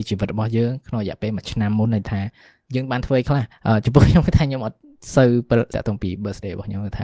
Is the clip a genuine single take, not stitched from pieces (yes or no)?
no